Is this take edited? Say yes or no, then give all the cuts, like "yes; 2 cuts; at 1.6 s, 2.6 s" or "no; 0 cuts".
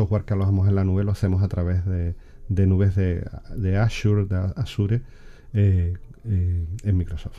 no; 0 cuts